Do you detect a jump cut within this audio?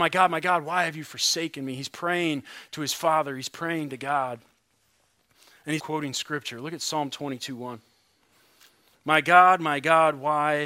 yes; 1 cut; at 5.8 s

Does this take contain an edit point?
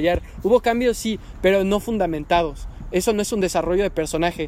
no; 0 cuts

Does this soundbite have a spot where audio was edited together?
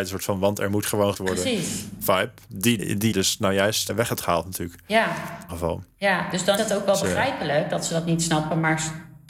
yes; 6 cuts; at 1.1 s, 2.8 s, 3.1 s, 3.9 s, 5.5 s, 6.6 s

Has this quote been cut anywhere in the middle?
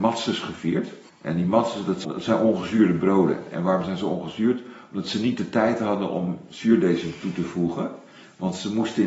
yes; 2 cuts; at 1.1 s, 2.0 s

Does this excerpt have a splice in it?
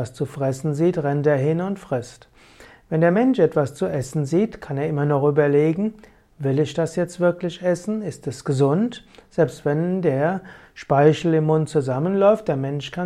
no; 0 cuts

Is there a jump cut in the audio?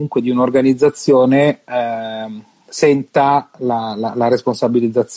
no; 0 cuts

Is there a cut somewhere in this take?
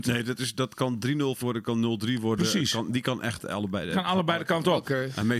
yes; 1 cut; at 1.4 s

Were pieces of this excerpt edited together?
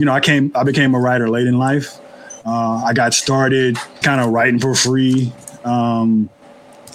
yes; 1 cut; at 4.0 s

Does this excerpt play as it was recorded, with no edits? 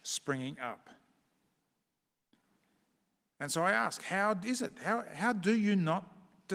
yes; 0 cuts

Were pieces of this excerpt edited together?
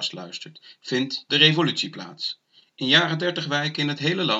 no; 0 cuts

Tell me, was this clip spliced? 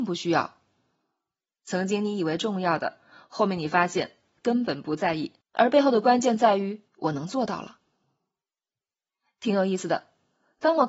yes; 2 cuts; at 5.4 s, 6.9 s

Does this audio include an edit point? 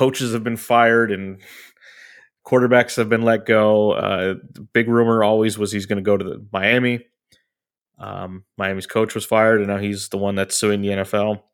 no; 0 cuts

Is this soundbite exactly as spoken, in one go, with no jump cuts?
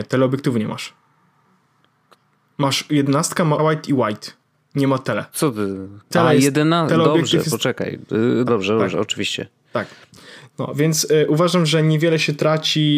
no; 2 cuts; at 3.6 s, 8.5 s

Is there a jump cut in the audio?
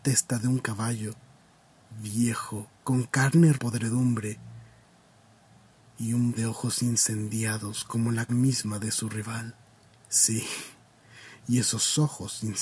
yes; 5 cuts; at 2.8 s, 3.5 s, 6.4 s, 8.3 s, 9.9 s

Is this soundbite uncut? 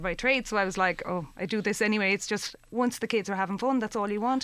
yes; 0 cuts

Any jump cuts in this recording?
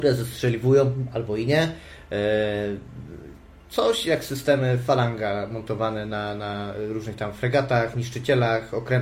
no; 0 cuts

